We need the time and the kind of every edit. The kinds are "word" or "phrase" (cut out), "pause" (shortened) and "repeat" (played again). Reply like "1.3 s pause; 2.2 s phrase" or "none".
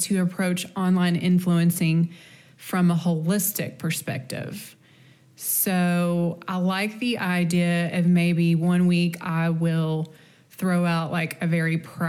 none